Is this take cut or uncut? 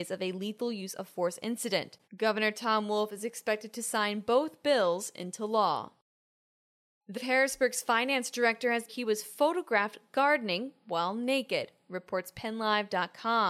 cut